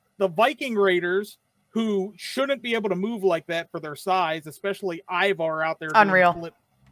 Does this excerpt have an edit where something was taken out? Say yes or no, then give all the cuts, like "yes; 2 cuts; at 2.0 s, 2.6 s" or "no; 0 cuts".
no; 0 cuts